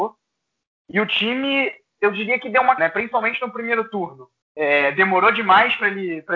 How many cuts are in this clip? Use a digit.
2